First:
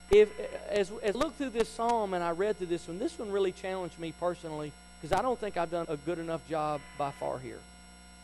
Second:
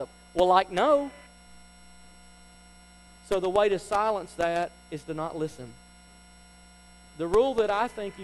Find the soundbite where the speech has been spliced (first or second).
first